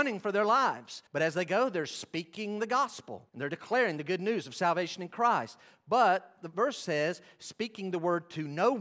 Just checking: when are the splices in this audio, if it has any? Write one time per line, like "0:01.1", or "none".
0:01.1
0:03.3